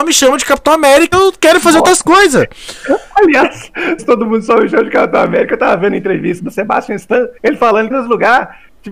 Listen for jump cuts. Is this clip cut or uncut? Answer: cut